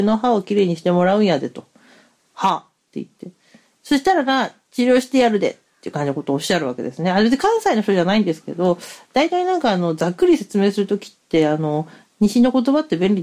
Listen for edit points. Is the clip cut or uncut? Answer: uncut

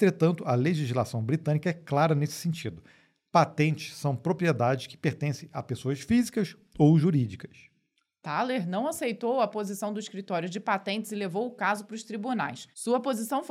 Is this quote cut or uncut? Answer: uncut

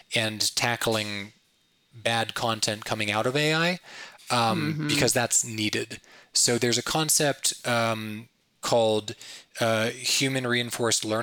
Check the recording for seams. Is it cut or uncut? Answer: uncut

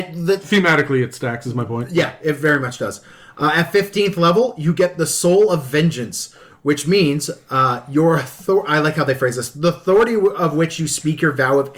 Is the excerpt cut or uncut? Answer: uncut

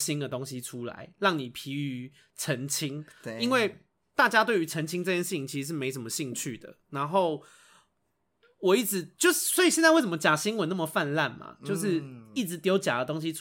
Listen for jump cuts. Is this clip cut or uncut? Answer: uncut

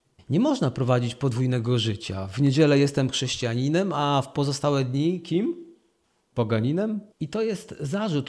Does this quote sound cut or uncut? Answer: cut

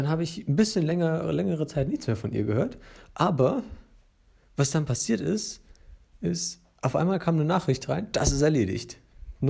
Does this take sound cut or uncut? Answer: uncut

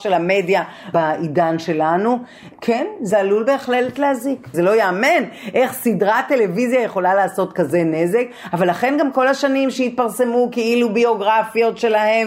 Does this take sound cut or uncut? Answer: uncut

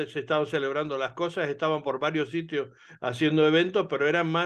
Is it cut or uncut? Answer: uncut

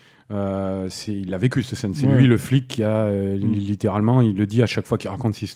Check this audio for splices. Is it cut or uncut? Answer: uncut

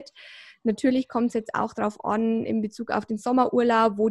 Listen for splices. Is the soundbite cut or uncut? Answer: uncut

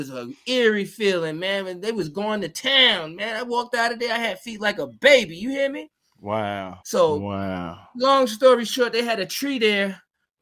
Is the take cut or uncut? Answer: cut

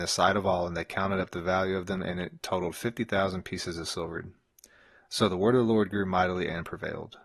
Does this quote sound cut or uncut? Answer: uncut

